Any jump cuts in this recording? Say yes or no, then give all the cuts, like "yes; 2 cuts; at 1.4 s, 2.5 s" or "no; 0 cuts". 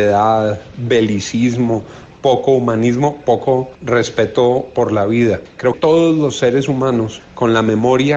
yes; 2 cuts; at 3.7 s, 5.7 s